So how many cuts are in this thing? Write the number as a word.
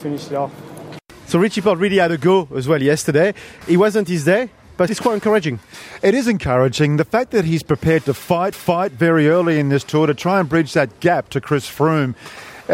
two